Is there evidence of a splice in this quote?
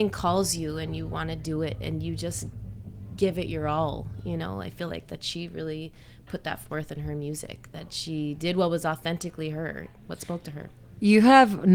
no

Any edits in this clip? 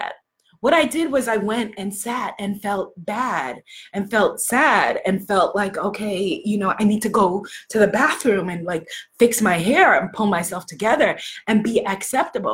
no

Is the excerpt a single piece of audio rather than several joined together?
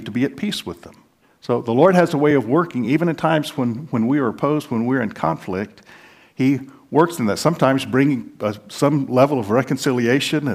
yes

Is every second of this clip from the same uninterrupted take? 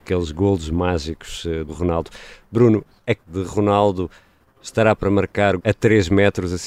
no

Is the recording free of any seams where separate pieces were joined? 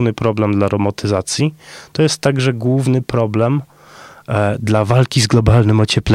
yes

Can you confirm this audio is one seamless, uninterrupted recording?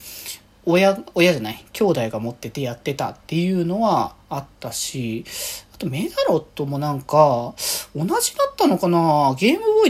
yes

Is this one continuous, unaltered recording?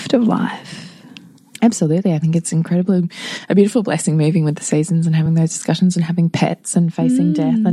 yes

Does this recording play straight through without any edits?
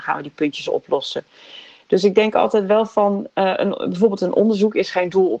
yes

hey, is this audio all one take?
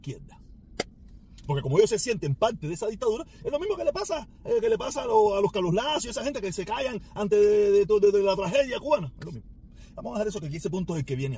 yes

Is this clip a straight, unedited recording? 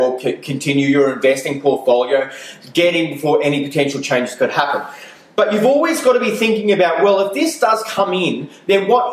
yes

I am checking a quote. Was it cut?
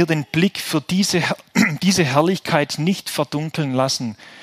no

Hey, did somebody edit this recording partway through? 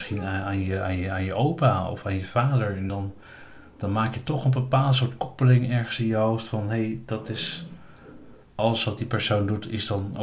no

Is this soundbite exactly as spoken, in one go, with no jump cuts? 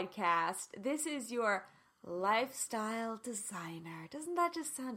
yes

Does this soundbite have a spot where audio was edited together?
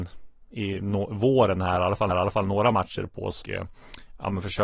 yes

